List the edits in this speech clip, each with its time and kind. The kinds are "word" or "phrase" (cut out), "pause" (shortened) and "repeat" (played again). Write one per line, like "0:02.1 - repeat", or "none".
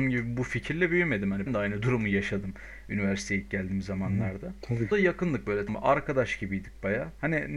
0:01.5 - word
0:04.9 - phrase
0:05.7 - word